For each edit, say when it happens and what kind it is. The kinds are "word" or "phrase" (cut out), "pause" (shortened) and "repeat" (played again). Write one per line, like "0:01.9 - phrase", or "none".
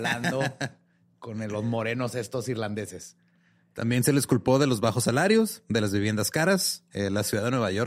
none